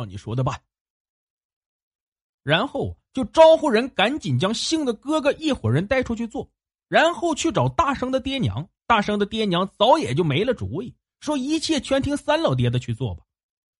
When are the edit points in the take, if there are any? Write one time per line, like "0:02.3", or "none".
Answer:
0:08.8